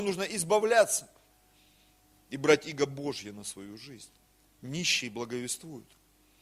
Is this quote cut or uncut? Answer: cut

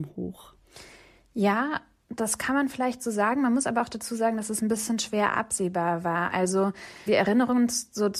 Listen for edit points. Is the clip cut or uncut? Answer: cut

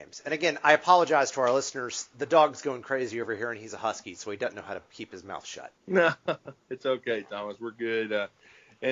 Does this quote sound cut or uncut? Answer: cut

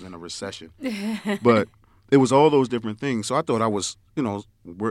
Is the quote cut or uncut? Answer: uncut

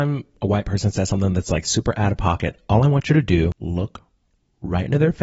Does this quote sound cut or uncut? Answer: uncut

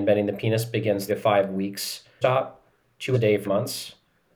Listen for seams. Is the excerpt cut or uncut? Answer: cut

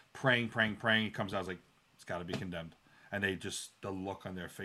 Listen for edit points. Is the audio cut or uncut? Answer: uncut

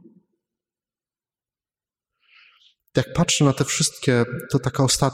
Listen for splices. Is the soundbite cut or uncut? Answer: uncut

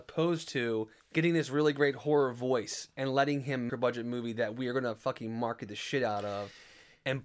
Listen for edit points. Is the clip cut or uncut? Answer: cut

